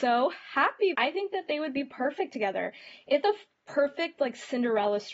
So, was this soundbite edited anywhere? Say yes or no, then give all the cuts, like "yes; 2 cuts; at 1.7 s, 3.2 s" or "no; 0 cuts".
yes; 2 cuts; at 0.9 s, 3.2 s